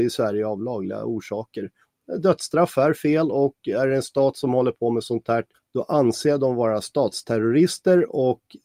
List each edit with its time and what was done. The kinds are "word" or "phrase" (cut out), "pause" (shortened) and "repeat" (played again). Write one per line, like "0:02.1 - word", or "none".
none